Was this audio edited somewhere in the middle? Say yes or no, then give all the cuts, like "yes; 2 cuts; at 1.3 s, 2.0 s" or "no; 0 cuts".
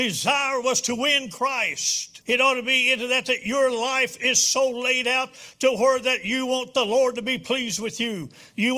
yes; 1 cut; at 2.2 s